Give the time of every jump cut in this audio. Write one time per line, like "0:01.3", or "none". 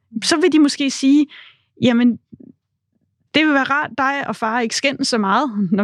none